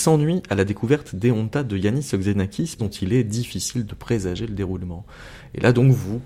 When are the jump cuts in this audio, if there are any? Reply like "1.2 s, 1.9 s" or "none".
2.8 s